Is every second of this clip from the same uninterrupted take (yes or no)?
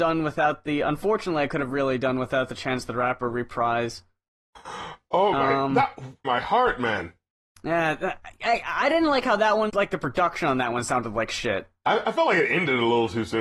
no